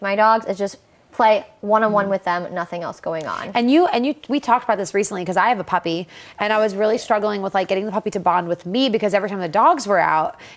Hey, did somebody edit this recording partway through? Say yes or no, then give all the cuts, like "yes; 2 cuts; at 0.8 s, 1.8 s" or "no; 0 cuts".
no; 0 cuts